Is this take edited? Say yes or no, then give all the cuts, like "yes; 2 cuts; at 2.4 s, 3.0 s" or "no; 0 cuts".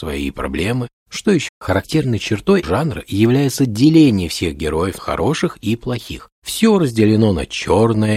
yes; 5 cuts; at 1.0 s, 1.5 s, 2.6 s, 5.0 s, 6.3 s